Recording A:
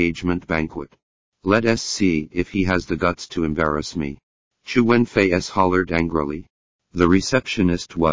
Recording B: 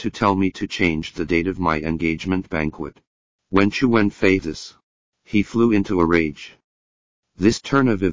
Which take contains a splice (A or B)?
B